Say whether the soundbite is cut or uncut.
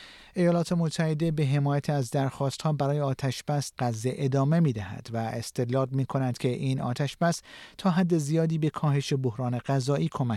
cut